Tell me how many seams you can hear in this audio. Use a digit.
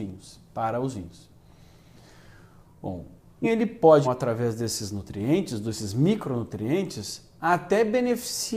2